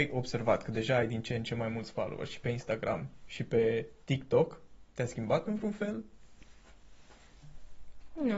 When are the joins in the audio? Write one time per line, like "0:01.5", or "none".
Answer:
none